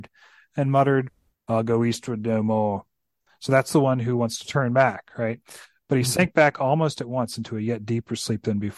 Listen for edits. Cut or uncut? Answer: uncut